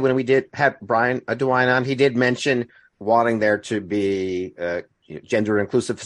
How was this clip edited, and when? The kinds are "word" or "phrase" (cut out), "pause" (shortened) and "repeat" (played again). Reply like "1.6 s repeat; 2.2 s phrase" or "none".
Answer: 2.9 s word